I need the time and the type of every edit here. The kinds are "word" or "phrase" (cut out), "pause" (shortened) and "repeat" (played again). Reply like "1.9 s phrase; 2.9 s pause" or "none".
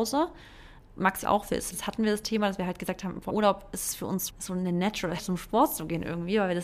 1.2 s word; 1.7 s word; 3.3 s word; 4.3 s word; 5.2 s word

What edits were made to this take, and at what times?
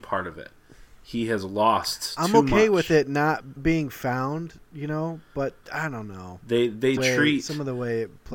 3.6 s word; 5.6 s word; 7.0 s phrase

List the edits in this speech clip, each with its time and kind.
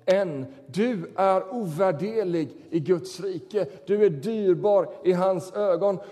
none

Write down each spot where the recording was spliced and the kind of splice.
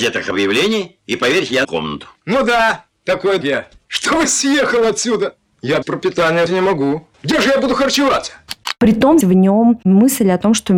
1.6 s phrase; 2.2 s pause; 3.4 s word; 5.8 s word; 6.5 s word; 7.1 s pause; 9.2 s phrase

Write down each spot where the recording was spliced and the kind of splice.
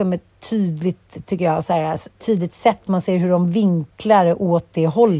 2.1 s pause

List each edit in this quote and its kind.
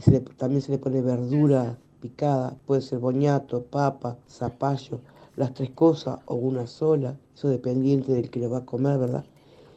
4.2 s pause; 7.2 s pause

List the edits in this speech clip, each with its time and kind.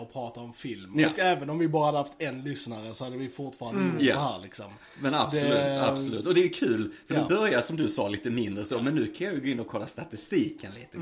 none

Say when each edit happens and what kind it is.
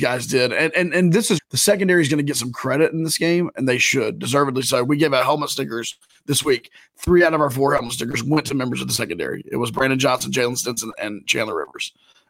1.4 s word

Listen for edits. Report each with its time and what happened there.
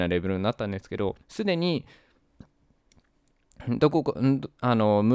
1.2 s pause

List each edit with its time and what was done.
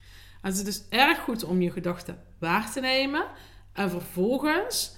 none

